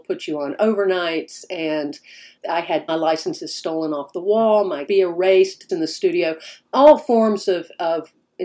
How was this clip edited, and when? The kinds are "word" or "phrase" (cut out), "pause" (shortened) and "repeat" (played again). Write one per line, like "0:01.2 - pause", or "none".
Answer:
0:02.4 - word
0:02.9 - word
0:04.9 - phrase
0:05.7 - phrase